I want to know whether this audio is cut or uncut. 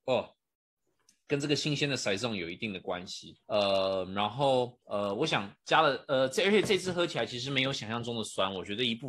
cut